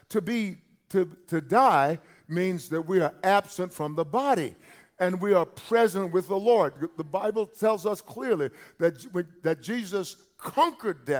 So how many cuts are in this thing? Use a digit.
0